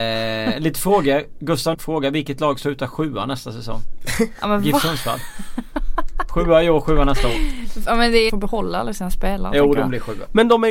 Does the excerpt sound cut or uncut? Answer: cut